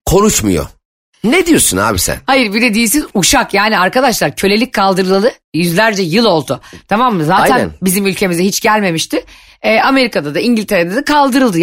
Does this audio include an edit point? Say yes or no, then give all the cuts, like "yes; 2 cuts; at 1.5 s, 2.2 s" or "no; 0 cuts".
no; 0 cuts